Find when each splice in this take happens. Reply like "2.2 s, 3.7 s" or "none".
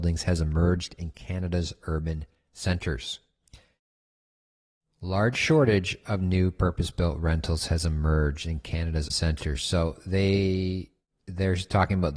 9.1 s